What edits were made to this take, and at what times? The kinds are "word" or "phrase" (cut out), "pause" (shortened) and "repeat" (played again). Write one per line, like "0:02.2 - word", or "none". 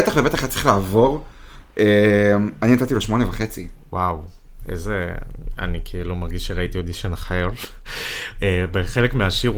none